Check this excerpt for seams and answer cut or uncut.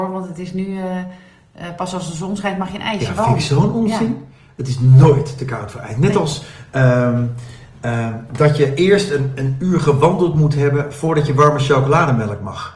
uncut